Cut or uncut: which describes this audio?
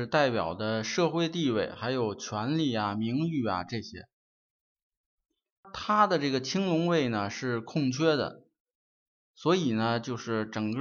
uncut